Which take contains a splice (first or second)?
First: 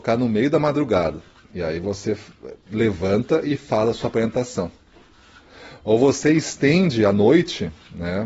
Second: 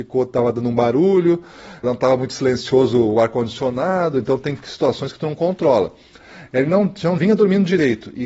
second